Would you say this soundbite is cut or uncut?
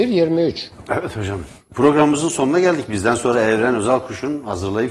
uncut